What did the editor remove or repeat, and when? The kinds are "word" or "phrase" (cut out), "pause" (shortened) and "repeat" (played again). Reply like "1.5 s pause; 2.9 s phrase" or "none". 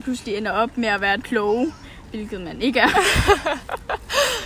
1.2 s word